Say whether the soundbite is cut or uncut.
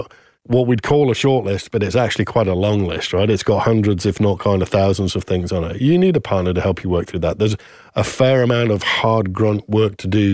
uncut